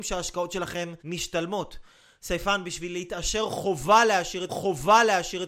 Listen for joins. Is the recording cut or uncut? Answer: cut